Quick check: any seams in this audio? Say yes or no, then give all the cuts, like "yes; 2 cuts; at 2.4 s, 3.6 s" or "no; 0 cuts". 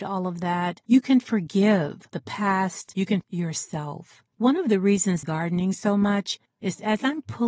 yes; 3 cuts; at 3.2 s, 4.3 s, 5.2 s